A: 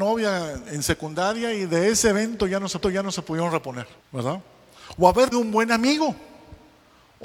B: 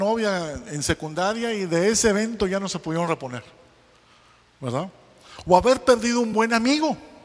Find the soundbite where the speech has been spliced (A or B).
A